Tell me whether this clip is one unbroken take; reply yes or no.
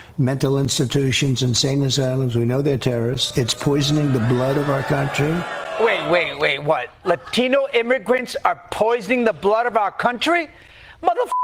yes